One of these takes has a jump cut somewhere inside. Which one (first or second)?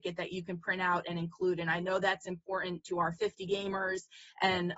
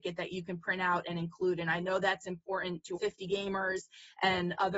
second